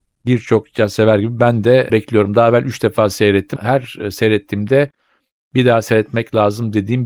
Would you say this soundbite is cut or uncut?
cut